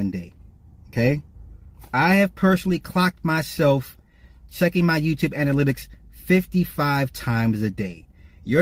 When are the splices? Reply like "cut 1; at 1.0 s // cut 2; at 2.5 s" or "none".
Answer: none